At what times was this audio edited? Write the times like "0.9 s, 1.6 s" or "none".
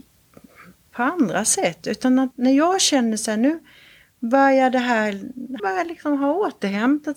2.3 s, 5.6 s